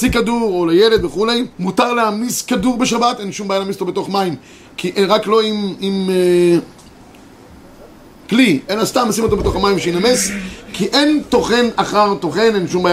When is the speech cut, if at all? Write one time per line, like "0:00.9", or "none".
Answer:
0:01.5